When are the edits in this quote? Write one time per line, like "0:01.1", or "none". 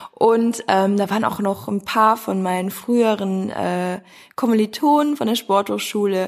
none